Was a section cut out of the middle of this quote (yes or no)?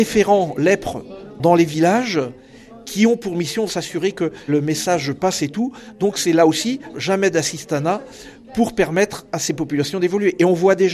yes